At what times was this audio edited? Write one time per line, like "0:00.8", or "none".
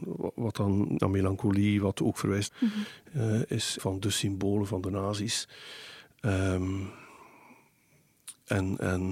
0:01.0
0:02.5
0:03.8